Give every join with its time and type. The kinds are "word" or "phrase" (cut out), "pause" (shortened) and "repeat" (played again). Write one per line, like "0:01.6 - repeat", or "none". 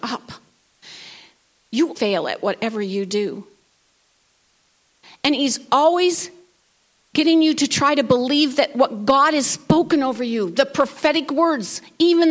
0:02.0 - word